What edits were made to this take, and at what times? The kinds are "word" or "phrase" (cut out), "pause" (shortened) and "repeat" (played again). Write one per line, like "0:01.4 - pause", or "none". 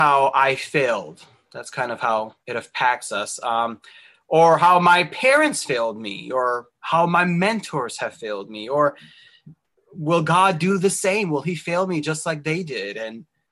0:02.4 - pause